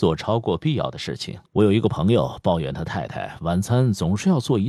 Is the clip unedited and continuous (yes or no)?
no